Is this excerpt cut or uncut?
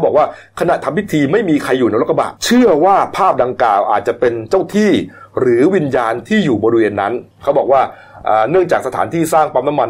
cut